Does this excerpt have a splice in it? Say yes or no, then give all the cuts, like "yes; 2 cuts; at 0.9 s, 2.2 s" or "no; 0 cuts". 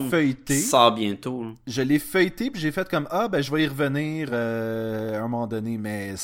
no; 0 cuts